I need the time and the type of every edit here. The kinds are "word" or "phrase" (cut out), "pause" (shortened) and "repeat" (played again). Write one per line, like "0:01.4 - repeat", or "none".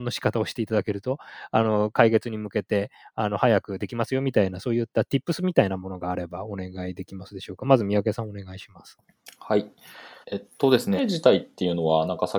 0:10.2 - pause
0:11.0 - phrase

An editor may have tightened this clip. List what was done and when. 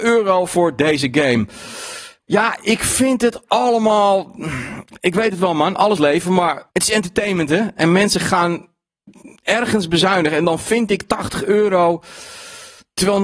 0:06.0 - phrase
0:06.7 - pause

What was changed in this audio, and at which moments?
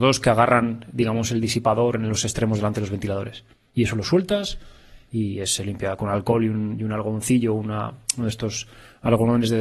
none

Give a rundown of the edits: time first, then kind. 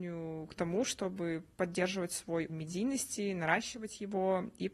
0:02.5 - word

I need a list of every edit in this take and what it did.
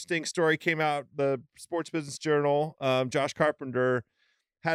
none

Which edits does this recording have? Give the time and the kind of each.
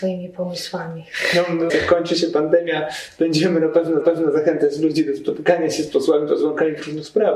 0:01.7 - phrase
0:04.0 - repeat

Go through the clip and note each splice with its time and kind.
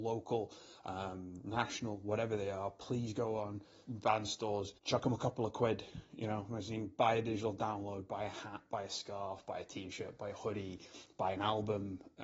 0:03.8 - word
0:04.8 - pause

